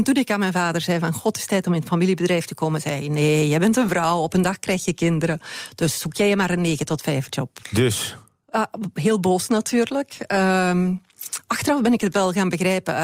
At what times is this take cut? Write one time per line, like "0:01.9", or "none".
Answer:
0:07.6